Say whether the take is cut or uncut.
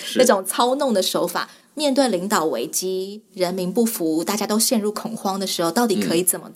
uncut